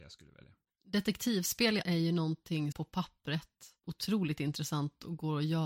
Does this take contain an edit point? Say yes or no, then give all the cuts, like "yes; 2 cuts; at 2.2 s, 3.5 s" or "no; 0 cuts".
yes; 3 cuts; at 1.8 s, 2.7 s, 3.8 s